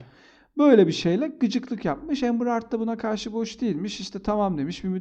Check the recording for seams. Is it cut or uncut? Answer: uncut